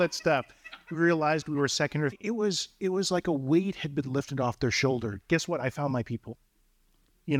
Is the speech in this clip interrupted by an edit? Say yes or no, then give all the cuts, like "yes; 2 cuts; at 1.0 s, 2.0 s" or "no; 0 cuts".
yes; 1 cut; at 2.1 s